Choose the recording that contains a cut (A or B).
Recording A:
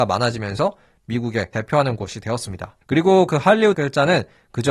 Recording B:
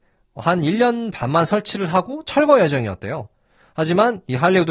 A